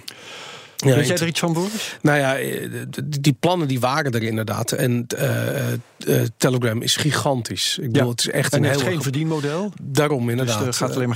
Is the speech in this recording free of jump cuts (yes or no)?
yes